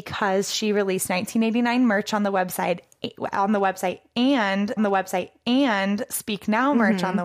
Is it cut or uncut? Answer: cut